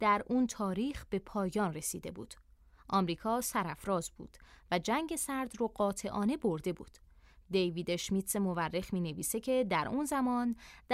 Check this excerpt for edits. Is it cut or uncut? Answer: uncut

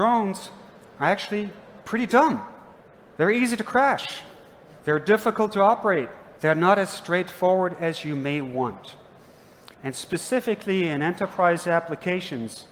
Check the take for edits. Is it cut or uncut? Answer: cut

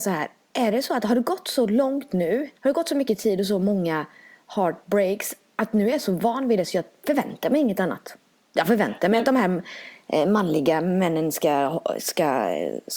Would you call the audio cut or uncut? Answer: cut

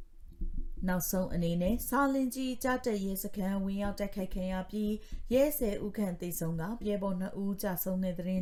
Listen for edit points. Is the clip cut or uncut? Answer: cut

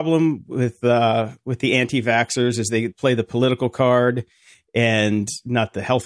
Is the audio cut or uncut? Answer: cut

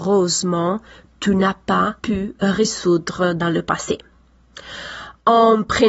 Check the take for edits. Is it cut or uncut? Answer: cut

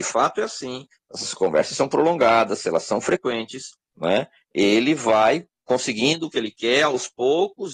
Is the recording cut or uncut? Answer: uncut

